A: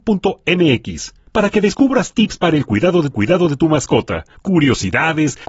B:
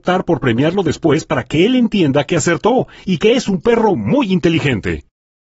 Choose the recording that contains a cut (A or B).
A